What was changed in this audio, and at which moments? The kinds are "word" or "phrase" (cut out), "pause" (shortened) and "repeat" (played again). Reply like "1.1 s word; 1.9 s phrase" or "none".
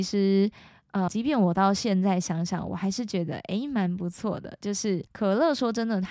1.1 s word; 5.1 s pause